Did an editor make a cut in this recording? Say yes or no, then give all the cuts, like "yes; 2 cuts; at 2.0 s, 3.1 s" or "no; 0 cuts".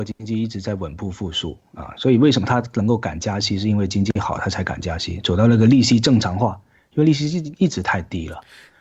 no; 0 cuts